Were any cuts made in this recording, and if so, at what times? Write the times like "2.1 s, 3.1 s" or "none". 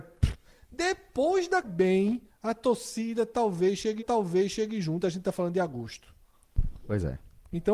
1.6 s, 2.3 s, 4.0 s